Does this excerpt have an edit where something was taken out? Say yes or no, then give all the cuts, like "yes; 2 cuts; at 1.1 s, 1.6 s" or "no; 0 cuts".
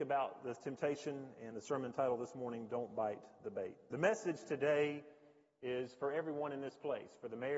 no; 0 cuts